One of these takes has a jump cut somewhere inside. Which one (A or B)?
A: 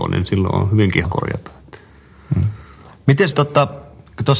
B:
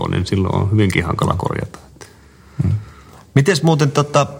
A